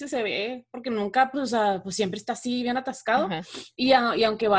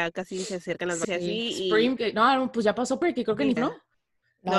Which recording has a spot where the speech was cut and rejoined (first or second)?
second